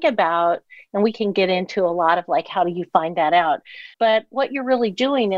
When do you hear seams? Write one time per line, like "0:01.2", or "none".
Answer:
0:03.9